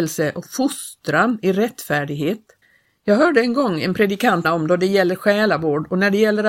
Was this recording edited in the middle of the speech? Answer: yes; 2 cuts; at 2.6 s, 4.4 s

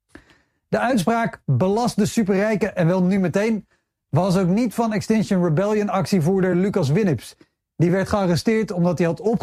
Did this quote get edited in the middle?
no; 0 cuts

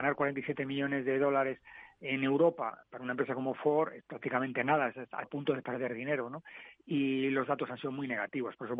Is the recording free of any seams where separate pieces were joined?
no; 1 cut; at 5.2 s

